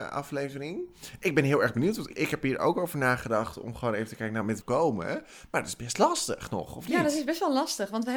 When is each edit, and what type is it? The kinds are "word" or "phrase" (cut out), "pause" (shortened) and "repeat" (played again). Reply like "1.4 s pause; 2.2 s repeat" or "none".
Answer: 2.1 s word; 4.6 s phrase